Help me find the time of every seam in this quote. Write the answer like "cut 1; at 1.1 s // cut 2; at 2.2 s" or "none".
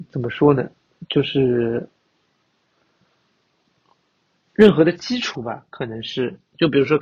none